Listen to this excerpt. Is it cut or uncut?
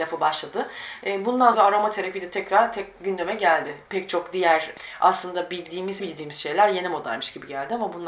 cut